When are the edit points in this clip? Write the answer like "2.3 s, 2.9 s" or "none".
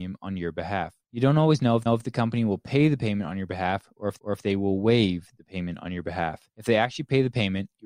1.0 s, 1.9 s, 4.2 s, 6.5 s